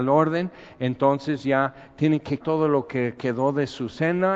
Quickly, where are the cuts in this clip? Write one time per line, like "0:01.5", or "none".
0:02.4